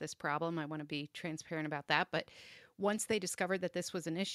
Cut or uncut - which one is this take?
uncut